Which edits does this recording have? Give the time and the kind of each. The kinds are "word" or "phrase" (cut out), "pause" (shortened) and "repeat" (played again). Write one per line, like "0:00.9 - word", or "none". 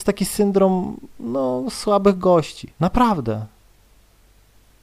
0:02.7 - pause